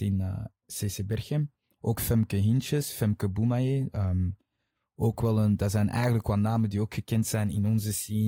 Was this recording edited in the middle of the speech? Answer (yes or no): no